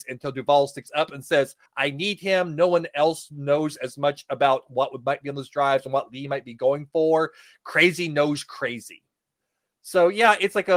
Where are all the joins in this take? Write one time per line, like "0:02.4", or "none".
0:01.7